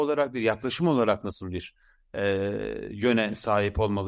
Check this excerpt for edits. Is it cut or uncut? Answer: uncut